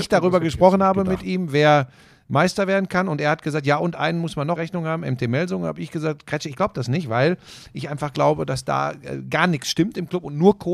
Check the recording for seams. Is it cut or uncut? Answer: cut